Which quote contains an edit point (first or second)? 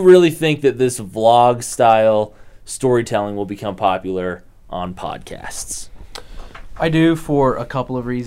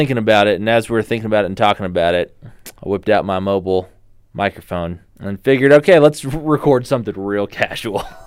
second